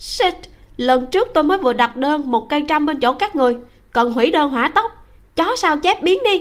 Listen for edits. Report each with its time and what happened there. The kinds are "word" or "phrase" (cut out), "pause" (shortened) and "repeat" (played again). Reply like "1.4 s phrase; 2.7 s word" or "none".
none